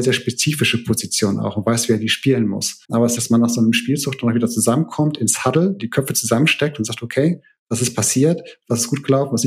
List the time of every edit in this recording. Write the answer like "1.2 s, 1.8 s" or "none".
2.8 s, 3.2 s